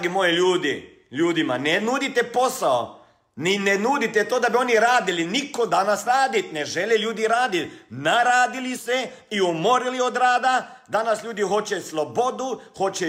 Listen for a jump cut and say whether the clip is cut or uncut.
cut